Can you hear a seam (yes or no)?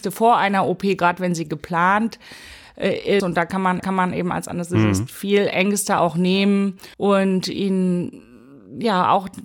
yes